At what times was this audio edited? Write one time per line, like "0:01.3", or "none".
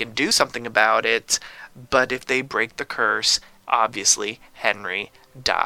none